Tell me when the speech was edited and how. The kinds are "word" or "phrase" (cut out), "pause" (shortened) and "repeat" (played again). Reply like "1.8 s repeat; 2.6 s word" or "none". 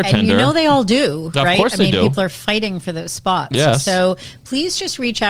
none